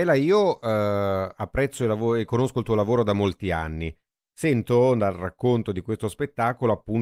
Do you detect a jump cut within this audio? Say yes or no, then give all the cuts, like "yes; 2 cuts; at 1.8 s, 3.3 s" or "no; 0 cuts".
no; 0 cuts